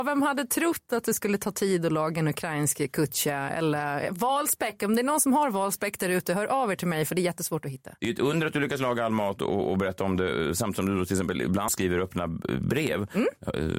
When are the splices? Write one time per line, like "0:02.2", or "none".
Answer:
0:11.7